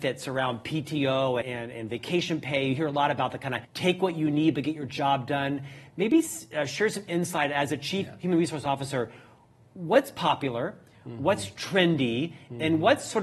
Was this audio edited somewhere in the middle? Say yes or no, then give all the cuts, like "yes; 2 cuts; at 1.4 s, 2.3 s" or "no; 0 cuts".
yes; 2 cuts; at 1.4 s, 3.6 s